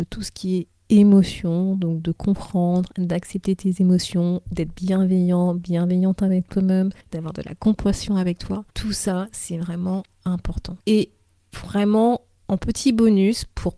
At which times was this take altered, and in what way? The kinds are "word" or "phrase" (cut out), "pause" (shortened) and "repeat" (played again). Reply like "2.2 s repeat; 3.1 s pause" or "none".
7.0 s pause; 8.7 s pause; 10.8 s pause

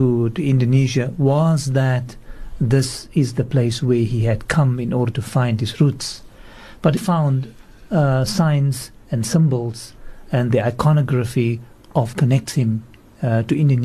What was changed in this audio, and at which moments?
7.0 s word; 12.1 s word

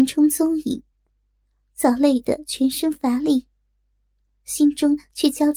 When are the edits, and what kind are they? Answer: none

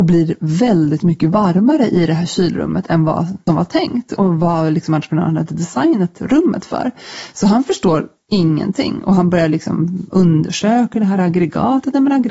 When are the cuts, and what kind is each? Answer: 3.5 s word

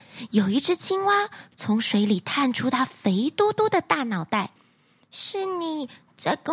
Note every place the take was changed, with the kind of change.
4.6 s pause

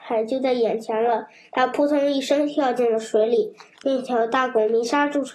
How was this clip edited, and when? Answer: none

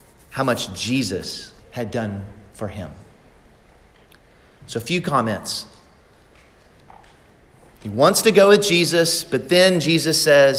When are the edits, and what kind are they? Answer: 1.6 s pause

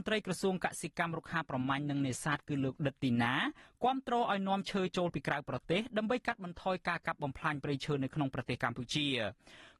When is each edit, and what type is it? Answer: none

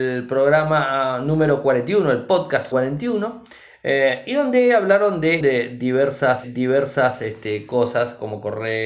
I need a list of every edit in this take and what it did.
2.7 s word; 5.4 s word; 6.4 s repeat

